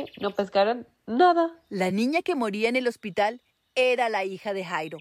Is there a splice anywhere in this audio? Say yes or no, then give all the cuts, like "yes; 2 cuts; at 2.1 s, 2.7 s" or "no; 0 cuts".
no; 0 cuts